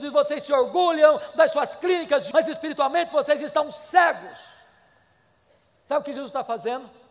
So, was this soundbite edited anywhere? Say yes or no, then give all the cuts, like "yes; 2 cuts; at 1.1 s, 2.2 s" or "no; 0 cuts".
yes; 1 cut; at 2.3 s